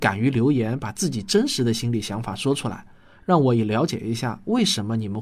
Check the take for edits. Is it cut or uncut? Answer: uncut